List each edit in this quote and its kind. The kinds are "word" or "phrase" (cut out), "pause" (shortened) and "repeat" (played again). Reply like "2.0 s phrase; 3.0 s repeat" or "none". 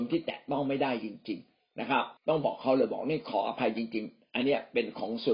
2.2 s pause